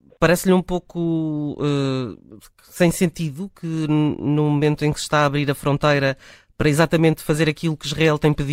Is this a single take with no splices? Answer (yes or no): yes